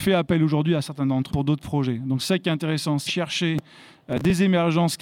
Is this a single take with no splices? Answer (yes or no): no